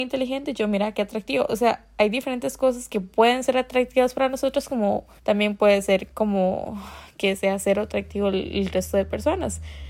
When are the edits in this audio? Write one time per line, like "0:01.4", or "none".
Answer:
0:05.2